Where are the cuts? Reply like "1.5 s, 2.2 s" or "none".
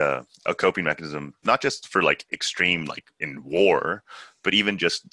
none